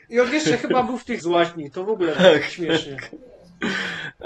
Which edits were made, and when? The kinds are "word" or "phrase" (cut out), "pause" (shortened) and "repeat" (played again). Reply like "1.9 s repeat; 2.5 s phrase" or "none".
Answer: 1.2 s word; 2.2 s word